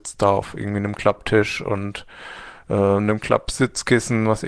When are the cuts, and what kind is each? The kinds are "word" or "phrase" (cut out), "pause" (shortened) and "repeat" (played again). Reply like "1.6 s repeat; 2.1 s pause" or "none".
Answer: none